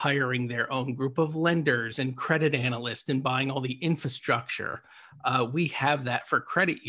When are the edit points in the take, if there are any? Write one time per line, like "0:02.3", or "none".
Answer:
none